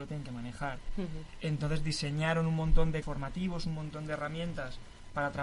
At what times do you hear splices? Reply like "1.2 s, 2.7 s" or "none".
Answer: 3.0 s